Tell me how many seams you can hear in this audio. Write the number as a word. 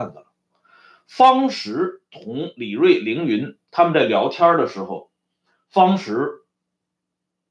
zero